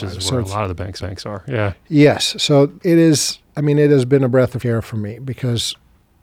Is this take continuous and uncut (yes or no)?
no